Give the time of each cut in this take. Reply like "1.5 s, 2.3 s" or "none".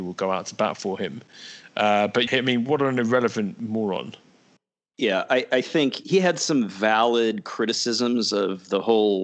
2.3 s, 6.0 s